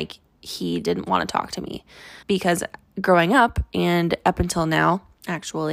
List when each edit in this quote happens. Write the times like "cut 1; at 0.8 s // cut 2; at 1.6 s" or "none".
cut 1; at 2.2 s